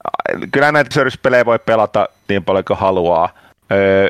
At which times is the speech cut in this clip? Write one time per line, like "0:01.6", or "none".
0:00.9
0:02.3